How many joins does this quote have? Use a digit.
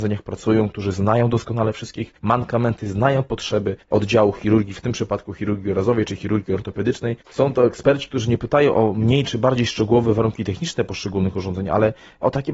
3